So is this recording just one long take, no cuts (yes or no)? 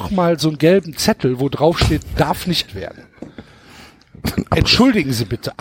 no